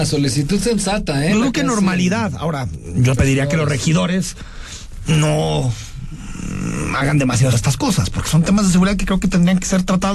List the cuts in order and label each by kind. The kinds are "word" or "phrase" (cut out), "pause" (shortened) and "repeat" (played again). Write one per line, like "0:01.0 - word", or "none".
0:03.2 - word
0:07.5 - word